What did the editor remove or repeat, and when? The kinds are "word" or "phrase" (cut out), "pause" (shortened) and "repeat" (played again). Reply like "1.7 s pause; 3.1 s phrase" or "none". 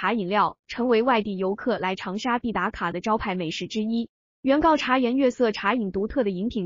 none